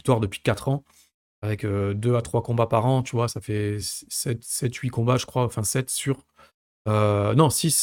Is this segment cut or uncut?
uncut